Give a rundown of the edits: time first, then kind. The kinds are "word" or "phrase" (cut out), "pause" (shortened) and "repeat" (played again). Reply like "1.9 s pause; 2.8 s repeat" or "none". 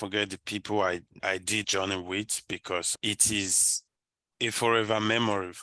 1.2 s word; 1.6 s word; 2.9 s word